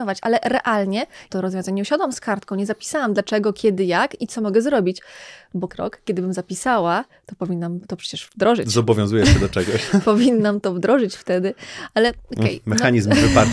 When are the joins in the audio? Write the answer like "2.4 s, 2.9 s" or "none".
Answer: 1.3 s, 5.7 s